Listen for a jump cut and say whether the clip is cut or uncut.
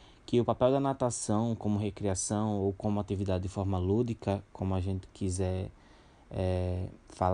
uncut